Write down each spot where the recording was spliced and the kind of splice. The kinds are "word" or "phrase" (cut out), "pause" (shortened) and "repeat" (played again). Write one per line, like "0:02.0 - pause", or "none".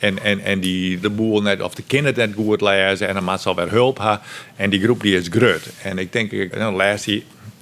0:01.0 - word
0:06.5 - word